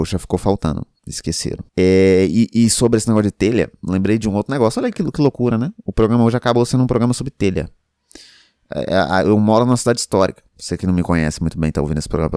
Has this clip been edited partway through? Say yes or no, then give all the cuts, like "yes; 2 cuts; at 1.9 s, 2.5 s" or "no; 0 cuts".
yes; 2 cuts; at 1.7 s, 10.5 s